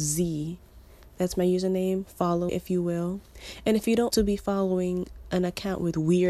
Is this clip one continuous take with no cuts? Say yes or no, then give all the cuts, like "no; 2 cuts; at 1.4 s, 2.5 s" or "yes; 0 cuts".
no; 2 cuts; at 2.5 s, 4.1 s